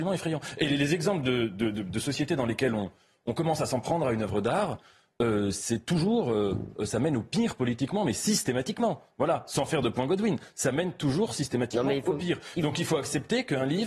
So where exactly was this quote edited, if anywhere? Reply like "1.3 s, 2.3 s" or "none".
none

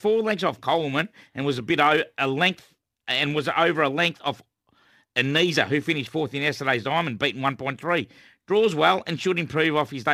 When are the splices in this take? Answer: none

